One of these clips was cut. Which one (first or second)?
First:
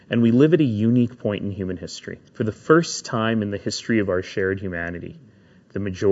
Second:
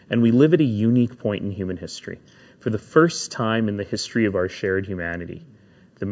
first